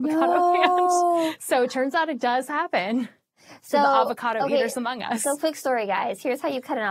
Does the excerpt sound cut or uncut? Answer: uncut